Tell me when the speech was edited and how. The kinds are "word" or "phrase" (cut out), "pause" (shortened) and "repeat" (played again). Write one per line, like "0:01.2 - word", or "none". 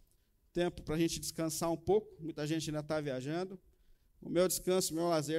none